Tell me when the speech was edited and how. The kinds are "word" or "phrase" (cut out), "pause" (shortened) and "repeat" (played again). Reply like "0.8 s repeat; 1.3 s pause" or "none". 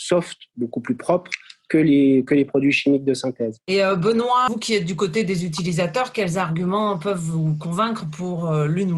none